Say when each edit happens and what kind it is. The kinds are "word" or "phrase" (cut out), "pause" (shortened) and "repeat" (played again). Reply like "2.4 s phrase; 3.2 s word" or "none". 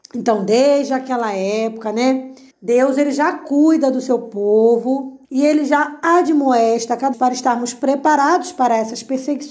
2.5 s pause; 5.2 s pause; 7.1 s phrase